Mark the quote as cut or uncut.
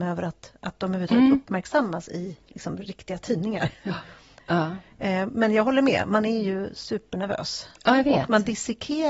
uncut